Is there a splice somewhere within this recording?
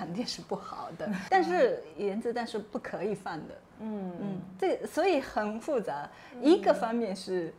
yes; 1 cut; at 1.9 s

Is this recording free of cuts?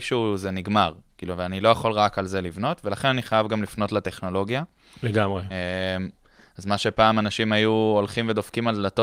yes; 0 cuts

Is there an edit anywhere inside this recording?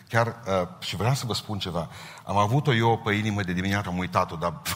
yes; 1 cut; at 3.8 s

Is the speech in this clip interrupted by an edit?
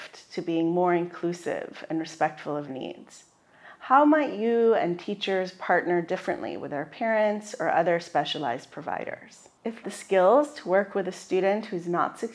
yes; 2 cuts; at 2.7 s, 9.8 s

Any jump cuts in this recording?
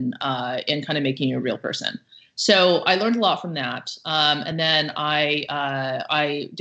no; 0 cuts

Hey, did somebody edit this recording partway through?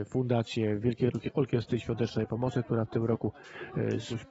no; 0 cuts

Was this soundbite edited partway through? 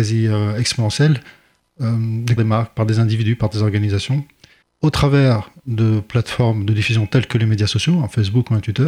yes; 2 cuts; at 2.4 s, 4.6 s

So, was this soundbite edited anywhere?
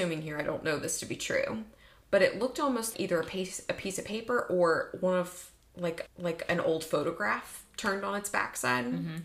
yes; 2 cuts; at 2.9 s, 6.1 s

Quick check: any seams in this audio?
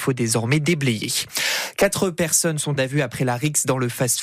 yes; 1 cut; at 2.8 s

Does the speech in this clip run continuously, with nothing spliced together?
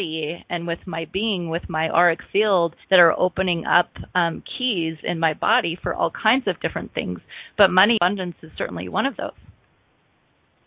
no; 1 cut; at 2.8 s

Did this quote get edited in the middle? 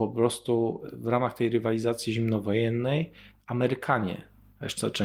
no; 0 cuts

